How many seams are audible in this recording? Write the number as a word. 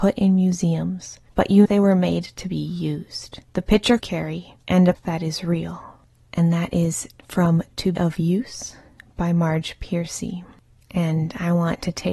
six